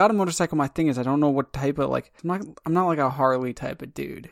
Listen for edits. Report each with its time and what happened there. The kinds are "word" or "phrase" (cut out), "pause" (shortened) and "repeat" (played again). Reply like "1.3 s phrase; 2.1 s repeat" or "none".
2.2 s pause